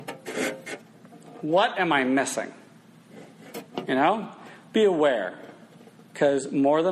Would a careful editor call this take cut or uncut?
uncut